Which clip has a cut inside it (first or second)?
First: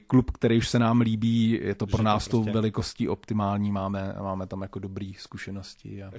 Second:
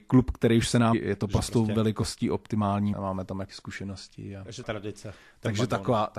second